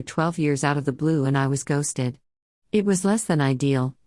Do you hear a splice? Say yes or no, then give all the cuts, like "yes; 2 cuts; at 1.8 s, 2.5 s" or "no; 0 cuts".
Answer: no; 0 cuts